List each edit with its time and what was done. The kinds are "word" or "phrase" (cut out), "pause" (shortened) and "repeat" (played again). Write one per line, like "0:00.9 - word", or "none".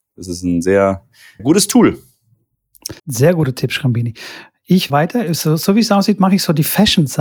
0:01.4 - word
0:03.0 - pause
0:04.9 - phrase